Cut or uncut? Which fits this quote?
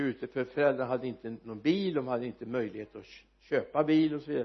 uncut